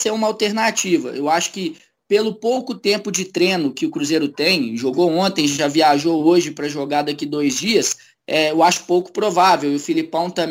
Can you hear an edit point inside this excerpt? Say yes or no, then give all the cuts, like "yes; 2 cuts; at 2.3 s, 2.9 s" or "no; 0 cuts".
no; 0 cuts